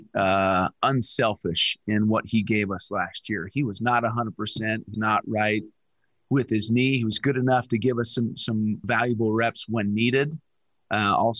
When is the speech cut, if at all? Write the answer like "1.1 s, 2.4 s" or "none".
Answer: 4.9 s, 8.8 s